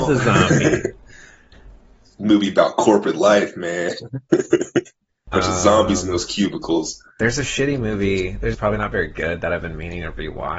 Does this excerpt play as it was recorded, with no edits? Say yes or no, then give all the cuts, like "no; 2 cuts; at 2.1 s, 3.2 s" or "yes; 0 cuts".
no; 3 cuts; at 5.3 s, 7.1 s, 8.5 s